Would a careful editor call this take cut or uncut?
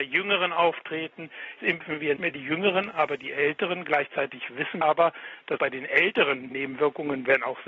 cut